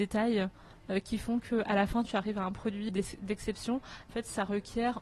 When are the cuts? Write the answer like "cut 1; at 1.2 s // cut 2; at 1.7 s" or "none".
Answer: cut 1; at 2.9 s // cut 2; at 4.1 s